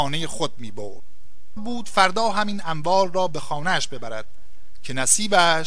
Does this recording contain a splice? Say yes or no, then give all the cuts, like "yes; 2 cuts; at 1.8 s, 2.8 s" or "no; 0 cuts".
yes; 1 cut; at 1.6 s